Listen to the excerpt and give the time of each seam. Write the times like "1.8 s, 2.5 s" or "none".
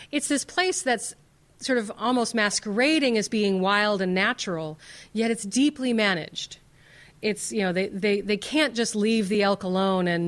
none